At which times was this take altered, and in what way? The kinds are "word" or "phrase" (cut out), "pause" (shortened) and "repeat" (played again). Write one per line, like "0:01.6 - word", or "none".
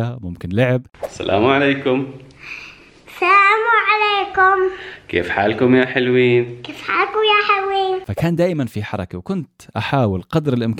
none